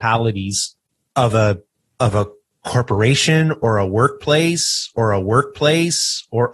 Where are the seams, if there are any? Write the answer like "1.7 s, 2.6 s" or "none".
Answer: 1.1 s, 1.8 s, 4.9 s